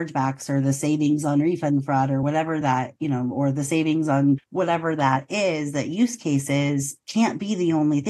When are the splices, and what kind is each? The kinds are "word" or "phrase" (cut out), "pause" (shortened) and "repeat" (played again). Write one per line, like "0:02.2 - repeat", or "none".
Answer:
none